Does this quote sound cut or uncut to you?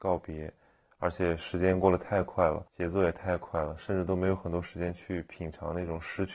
cut